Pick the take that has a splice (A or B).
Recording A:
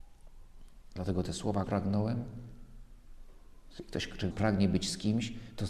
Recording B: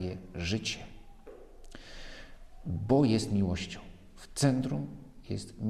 A